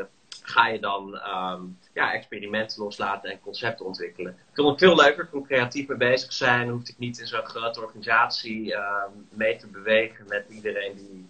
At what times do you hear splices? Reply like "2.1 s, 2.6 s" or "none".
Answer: 1.9 s, 4.4 s